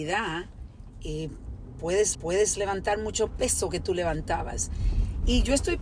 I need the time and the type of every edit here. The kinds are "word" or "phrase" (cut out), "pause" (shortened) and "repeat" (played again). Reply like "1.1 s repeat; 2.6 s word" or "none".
2.1 s repeat; 3.3 s phrase